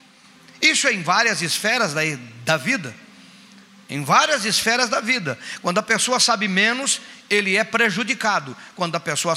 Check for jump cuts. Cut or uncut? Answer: uncut